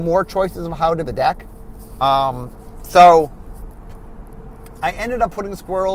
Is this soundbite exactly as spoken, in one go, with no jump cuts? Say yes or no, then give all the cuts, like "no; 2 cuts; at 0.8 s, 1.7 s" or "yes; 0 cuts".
no; 1 cut; at 1.0 s